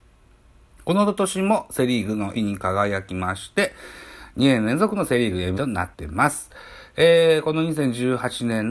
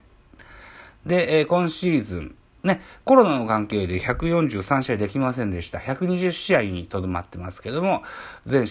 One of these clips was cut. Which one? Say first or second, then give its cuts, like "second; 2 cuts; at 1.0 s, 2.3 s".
first; 3 cuts; at 2.3 s, 5.6 s, 5.9 s